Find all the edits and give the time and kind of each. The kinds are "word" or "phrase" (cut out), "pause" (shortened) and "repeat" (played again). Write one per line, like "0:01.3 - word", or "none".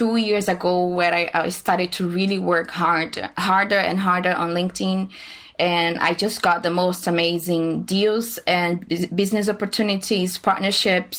none